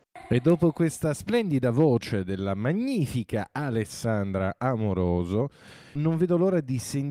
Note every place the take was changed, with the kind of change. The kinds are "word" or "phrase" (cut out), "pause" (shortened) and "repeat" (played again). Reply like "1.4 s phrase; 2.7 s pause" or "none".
none